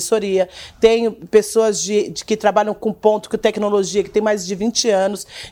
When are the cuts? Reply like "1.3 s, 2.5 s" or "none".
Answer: none